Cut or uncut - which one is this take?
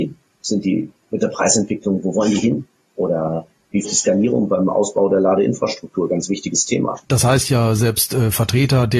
cut